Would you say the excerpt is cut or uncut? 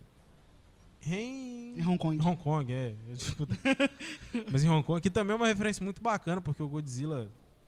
uncut